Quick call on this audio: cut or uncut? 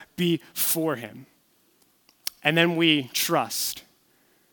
uncut